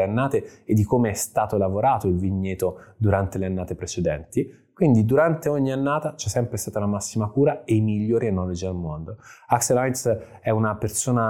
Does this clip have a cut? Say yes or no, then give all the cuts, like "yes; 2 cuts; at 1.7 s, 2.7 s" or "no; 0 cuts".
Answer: no; 0 cuts